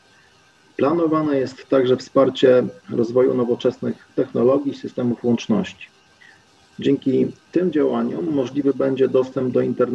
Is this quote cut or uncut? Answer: uncut